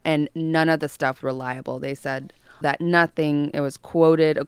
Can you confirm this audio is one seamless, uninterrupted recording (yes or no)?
no